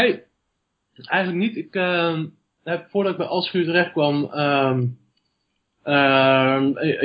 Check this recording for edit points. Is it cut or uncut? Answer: uncut